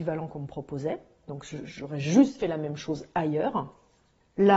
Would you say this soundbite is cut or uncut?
uncut